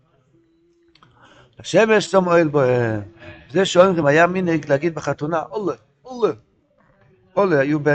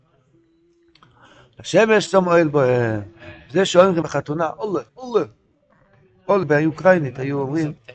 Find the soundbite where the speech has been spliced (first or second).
second